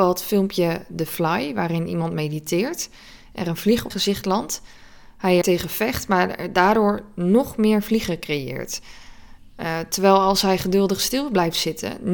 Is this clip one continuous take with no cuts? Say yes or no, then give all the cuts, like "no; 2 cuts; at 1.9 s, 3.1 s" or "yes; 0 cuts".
no; 2 cuts; at 3.9 s, 5.4 s